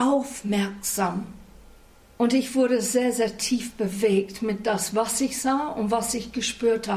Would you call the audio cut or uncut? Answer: uncut